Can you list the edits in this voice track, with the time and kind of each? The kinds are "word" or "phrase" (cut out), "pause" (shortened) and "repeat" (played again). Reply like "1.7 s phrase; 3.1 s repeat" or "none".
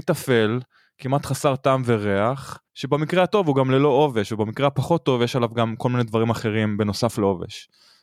2.7 s pause